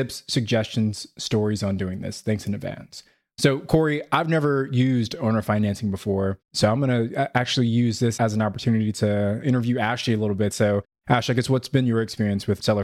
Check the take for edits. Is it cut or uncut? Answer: uncut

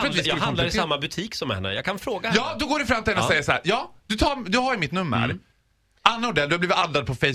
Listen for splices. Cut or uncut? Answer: uncut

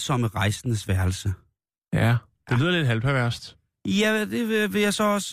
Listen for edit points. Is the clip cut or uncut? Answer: uncut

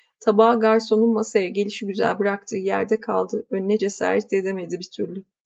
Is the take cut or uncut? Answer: cut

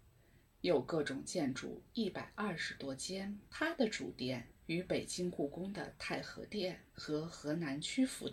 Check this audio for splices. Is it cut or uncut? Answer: cut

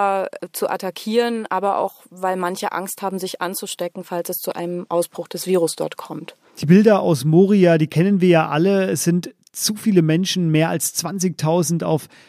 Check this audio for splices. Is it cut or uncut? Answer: uncut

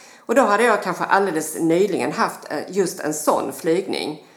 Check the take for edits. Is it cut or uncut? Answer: uncut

